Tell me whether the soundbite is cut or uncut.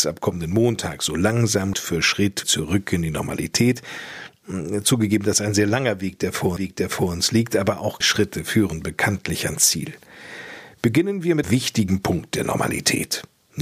cut